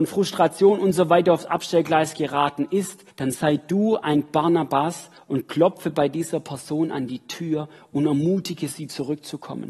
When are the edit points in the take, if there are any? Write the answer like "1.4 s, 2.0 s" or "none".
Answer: 3.1 s